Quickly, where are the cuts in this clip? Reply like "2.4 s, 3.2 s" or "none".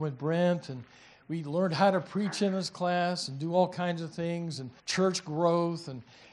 4.8 s